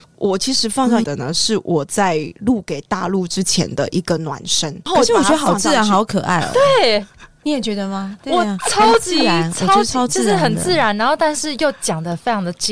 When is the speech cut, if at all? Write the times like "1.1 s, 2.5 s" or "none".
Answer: 1.0 s